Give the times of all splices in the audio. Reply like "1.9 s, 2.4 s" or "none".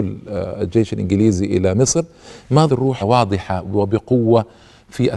2.7 s, 3.0 s